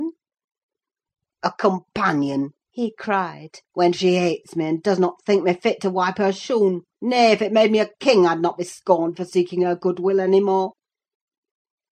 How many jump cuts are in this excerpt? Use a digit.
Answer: 3